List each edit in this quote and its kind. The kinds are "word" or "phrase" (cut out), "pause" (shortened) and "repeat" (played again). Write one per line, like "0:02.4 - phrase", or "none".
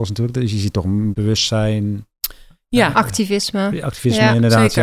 0:01.1 - word
0:02.9 - word